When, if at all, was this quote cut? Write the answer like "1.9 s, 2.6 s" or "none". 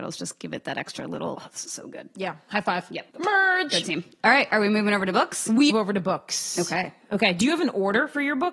1.3 s, 3.1 s, 5.7 s